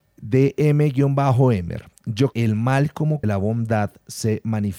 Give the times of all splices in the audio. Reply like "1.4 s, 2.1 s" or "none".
2.3 s, 3.2 s